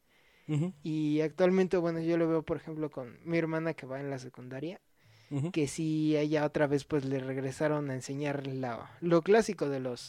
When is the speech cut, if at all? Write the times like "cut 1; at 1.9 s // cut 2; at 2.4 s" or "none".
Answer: none